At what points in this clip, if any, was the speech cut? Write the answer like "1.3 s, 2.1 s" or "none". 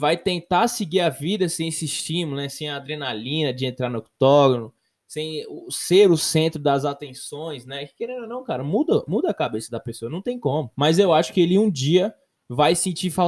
10.7 s